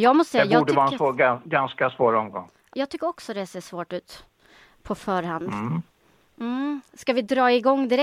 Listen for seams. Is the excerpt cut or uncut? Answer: cut